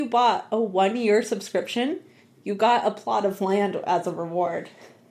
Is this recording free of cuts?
yes; 0 cuts

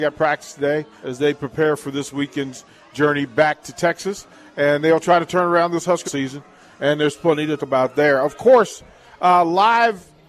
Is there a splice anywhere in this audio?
yes; 3 cuts; at 1.0 s, 6.0 s, 7.6 s

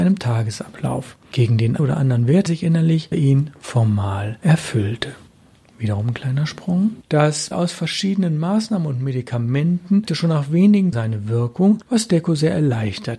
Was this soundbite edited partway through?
yes; 6 cuts; at 1.8 s, 2.5 s, 3.1 s, 7.5 s, 10.1 s, 10.9 s

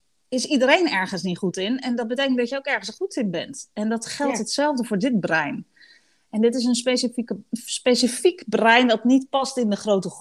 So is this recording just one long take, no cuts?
yes; 0 cuts

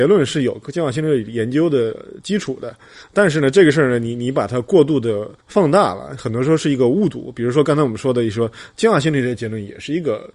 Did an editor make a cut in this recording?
yes; 1 cut; at 5.4 s

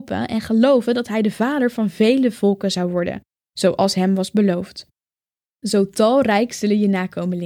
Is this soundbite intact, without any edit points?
yes; 0 cuts

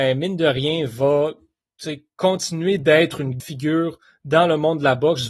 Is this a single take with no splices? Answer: no; 1 cut; at 3.4 s

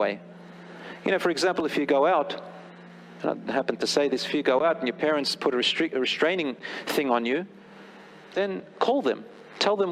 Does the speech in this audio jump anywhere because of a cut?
no; 0 cuts

